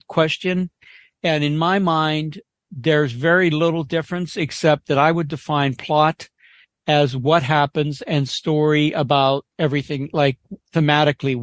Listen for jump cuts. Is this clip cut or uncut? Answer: uncut